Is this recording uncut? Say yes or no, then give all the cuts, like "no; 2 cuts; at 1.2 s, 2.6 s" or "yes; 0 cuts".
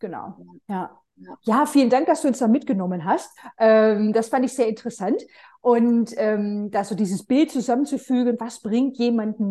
yes; 0 cuts